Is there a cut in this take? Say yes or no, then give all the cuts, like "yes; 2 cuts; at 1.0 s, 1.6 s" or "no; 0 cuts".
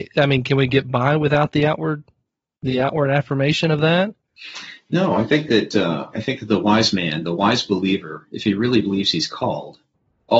no; 0 cuts